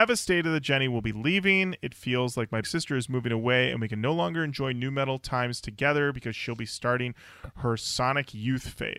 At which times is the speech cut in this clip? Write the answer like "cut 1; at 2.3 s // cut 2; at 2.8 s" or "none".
cut 1; at 2.6 s